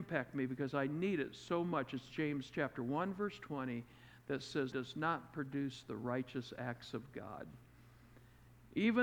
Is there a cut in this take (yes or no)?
yes